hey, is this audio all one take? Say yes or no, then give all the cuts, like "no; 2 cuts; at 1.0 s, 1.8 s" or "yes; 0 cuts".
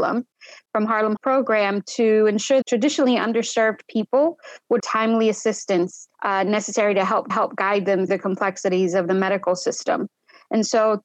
no; 6 cuts; at 1.2 s, 2.6 s, 4.8 s, 6.1 s, 7.3 s, 8.1 s